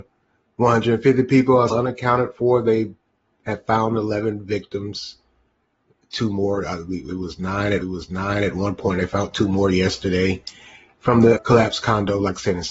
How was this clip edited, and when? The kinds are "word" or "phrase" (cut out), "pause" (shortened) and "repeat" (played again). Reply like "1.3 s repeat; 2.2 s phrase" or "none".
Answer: 1.7 s word; 7.8 s repeat; 11.4 s word